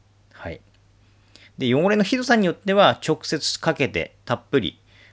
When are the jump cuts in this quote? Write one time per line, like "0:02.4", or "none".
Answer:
0:04.2